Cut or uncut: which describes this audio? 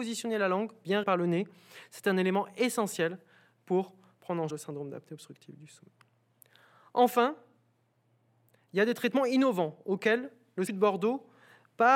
cut